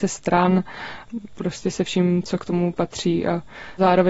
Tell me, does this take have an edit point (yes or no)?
no